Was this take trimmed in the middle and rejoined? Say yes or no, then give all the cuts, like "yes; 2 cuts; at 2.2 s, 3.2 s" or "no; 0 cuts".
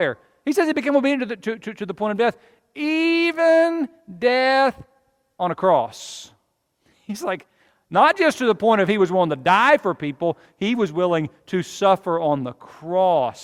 no; 0 cuts